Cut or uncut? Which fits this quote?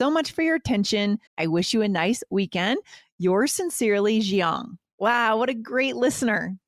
cut